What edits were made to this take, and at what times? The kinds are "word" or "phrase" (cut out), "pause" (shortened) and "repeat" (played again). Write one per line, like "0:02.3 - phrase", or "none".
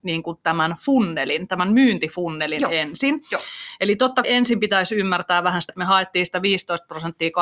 0:04.2 - word
0:05.7 - word